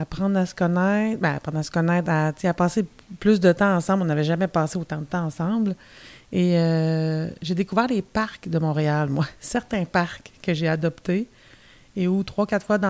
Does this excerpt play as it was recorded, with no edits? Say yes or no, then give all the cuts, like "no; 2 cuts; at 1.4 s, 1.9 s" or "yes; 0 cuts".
yes; 0 cuts